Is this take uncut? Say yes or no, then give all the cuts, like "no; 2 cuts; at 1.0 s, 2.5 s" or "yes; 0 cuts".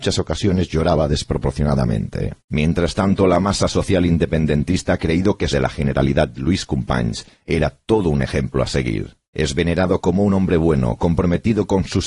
no; 3 cuts; at 2.4 s, 5.5 s, 9.2 s